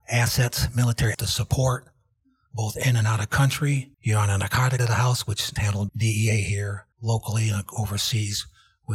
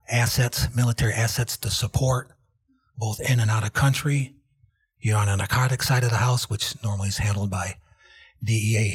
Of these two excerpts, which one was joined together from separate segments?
first; 6 cuts; at 1.1 s, 3.9 s, 4.8 s, 5.6 s, 5.9 s, 6.9 s

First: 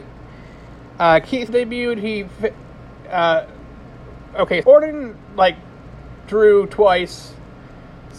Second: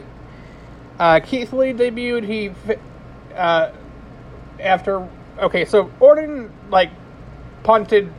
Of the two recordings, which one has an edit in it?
first; 4 cuts; at 1.5 s, 4.3 s, 4.6 s, 6.2 s

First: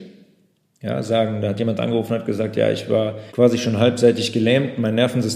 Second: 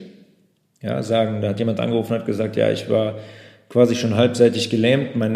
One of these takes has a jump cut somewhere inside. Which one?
first; 1 cut; at 3.3 s

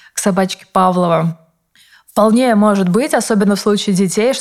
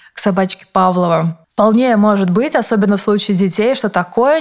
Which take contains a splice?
second; 1 cut; at 1.4 s

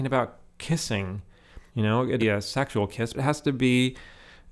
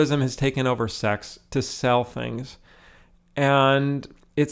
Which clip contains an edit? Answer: first; 3 cuts; at 1.7 s, 2.2 s, 3.1 s

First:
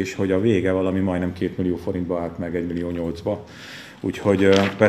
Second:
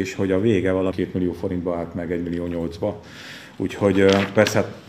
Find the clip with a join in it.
second; 1 cut; at 0.9 s

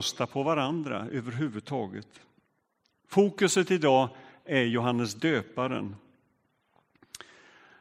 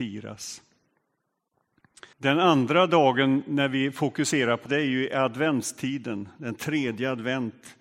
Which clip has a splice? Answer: second; 2 cuts; at 2.1 s, 4.7 s

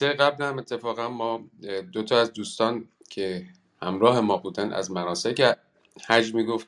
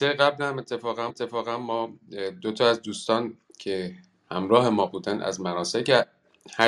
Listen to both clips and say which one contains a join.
second; 1 cut; at 1.1 s

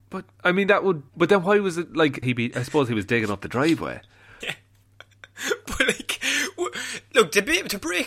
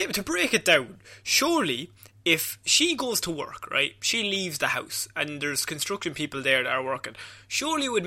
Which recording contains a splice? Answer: first; 3 cuts; at 1.1 s, 2.2 s, 4.4 s

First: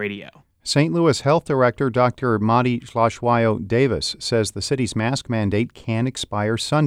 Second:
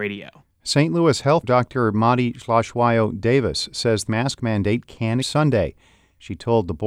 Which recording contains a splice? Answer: second; 3 cuts; at 1.4 s, 4.1 s, 5.2 s

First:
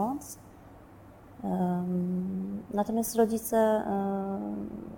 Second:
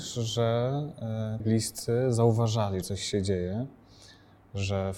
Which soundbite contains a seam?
second; 2 cuts; at 1.4 s, 2.8 s

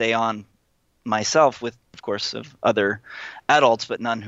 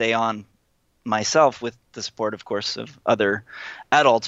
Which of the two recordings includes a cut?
first; 1 cut; at 1.9 s

